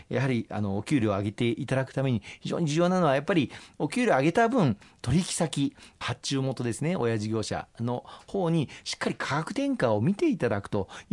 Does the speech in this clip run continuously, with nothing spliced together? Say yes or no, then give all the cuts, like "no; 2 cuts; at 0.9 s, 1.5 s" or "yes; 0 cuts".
yes; 0 cuts